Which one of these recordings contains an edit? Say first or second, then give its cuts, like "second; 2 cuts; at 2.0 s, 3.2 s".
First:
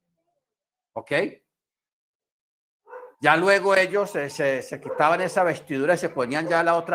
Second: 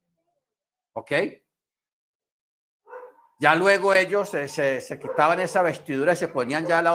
first; 1 cut; at 3.1 s